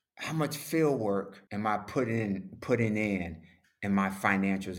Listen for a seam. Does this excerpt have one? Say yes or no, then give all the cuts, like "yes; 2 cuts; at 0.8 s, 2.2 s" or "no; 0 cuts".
yes; 1 cut; at 1.5 s